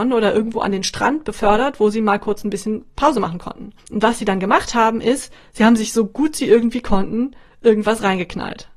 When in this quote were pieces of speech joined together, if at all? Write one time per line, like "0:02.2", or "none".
0:03.8